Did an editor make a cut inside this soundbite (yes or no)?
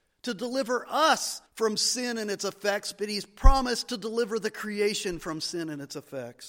yes